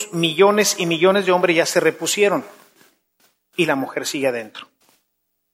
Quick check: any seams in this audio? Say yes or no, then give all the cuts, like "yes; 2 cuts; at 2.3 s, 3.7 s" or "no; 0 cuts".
no; 0 cuts